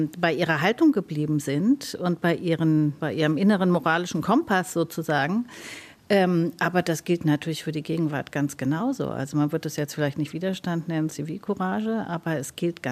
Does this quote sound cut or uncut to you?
cut